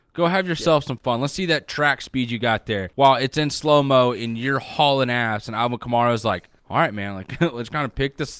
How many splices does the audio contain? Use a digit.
2